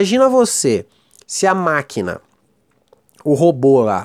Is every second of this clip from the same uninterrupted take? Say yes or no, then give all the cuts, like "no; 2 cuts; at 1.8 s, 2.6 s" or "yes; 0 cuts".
yes; 0 cuts